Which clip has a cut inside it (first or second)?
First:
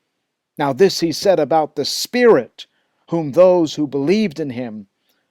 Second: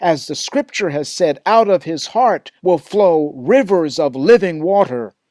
second